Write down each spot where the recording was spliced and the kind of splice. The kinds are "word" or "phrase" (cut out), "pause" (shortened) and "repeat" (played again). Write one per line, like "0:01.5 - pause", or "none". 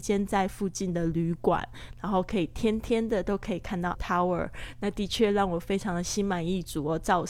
0:03.9 - word